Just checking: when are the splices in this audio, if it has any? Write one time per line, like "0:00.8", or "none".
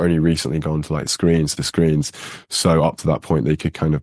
0:01.1
0:01.6